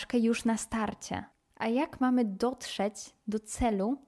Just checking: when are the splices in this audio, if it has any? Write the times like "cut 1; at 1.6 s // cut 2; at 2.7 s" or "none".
cut 1; at 1.3 s